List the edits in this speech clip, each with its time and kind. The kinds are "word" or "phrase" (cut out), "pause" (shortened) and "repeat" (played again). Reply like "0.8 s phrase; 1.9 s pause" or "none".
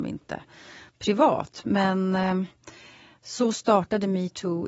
none